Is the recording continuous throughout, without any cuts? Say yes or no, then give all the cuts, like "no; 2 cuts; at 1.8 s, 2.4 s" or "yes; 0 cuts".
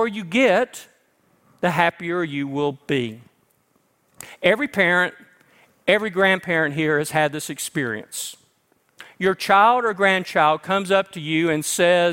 yes; 0 cuts